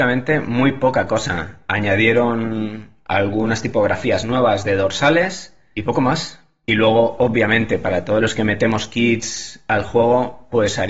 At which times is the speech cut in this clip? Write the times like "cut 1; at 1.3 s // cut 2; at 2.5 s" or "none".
none